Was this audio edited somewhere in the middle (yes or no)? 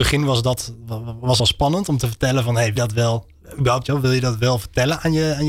yes